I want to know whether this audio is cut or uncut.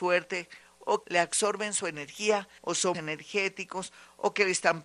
cut